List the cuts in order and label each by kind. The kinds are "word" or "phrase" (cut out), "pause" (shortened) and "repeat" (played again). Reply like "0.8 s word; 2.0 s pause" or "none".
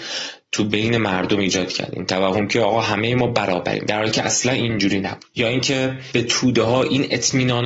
none